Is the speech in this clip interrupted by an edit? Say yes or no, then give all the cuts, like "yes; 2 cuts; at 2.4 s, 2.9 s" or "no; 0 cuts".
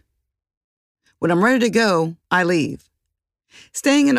yes; 1 cut; at 2.2 s